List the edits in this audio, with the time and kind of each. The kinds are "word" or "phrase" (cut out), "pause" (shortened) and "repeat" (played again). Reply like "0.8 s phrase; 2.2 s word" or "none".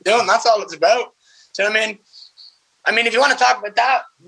none